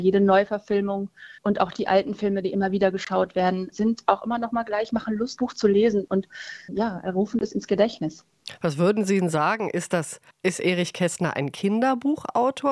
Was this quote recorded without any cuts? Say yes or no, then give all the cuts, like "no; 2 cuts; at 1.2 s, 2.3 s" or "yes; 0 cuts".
no; 4 cuts; at 1.4 s, 5.4 s, 6.7 s, 10.3 s